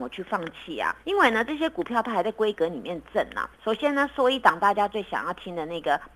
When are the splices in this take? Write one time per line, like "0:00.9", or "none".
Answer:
0:01.0
0:03.5